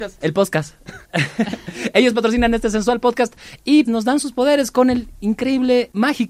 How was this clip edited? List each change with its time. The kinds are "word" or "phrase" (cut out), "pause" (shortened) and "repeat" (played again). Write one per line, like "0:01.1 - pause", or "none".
0:01.0 - pause
0:03.9 - word

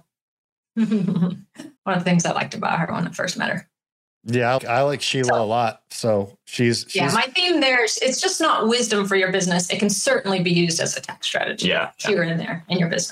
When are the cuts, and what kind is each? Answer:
0:01.8 - pause
0:04.6 - word

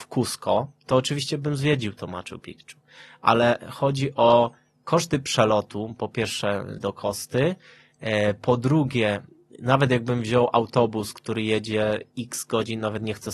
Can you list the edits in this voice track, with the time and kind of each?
0:06.8 - phrase

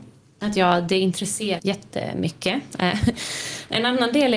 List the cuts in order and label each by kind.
0:01.6 - phrase

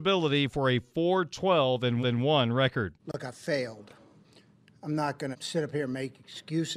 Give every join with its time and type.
0:02.0 - repeat
0:03.0 - pause
0:04.2 - pause
0:05.3 - word

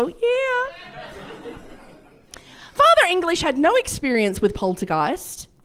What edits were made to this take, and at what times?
none

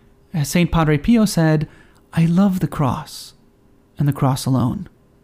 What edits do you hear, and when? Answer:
none

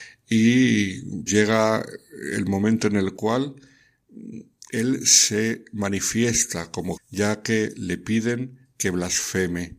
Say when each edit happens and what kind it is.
0:01.3 - word
0:07.0 - word

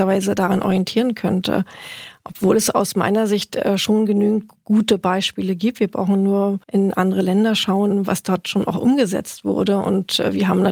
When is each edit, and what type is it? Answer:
0:06.6 - pause

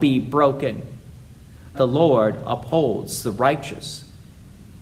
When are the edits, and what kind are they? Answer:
0:01.7 - word

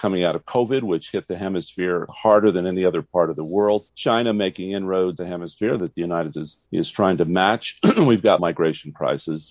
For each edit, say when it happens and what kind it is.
0:02.1 - word
0:03.9 - pause
0:05.2 - word
0:06.3 - word
0:06.6 - pause
0:08.4 - word

